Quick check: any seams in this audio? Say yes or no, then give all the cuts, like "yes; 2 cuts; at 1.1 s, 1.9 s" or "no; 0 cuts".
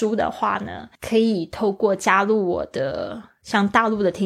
yes; 1 cut; at 0.9 s